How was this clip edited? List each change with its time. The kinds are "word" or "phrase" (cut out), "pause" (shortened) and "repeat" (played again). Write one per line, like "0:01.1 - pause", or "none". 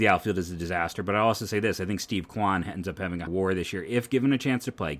0:03.3 - word